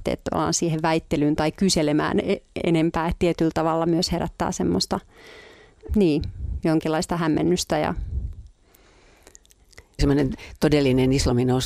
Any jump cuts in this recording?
yes; 2 cuts; at 5.9 s, 10.0 s

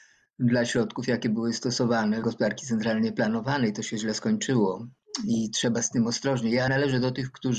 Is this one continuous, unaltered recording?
no; 2 cuts; at 2.2 s, 6.7 s

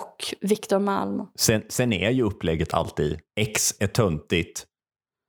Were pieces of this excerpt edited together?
yes; 1 cut; at 3.3 s

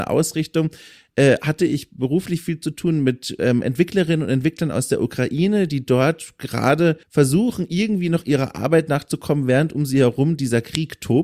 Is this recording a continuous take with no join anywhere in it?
no; 1 cut; at 7.0 s

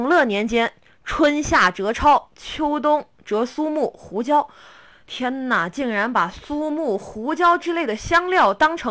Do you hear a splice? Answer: no; 0 cuts

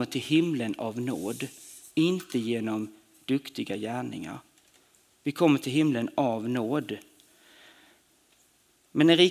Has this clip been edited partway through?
no; 0 cuts

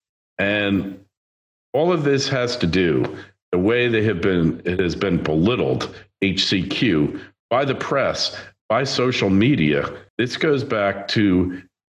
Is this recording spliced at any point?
no; 0 cuts

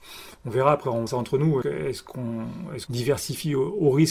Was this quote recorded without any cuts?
no; 3 cuts; at 1.1 s, 1.6 s, 2.9 s

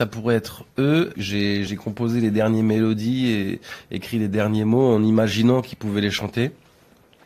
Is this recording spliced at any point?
no; 0 cuts

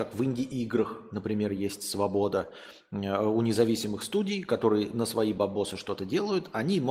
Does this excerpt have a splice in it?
no; 0 cuts

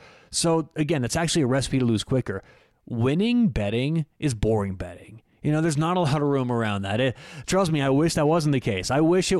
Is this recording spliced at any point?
no; 0 cuts

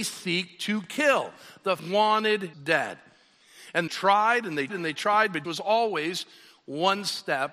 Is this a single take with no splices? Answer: no; 5 cuts; at 1.8 s, 2.5 s, 3.9 s, 4.7 s, 5.4 s

